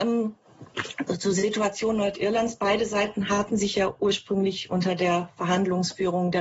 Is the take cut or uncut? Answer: uncut